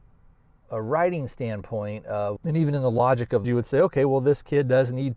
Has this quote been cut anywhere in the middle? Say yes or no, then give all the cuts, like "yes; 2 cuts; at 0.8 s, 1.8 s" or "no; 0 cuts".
yes; 2 cuts; at 2.4 s, 3.4 s